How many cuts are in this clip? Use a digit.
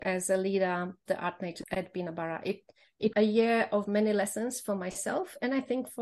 3